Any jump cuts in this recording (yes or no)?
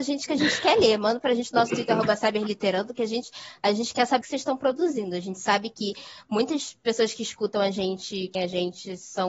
yes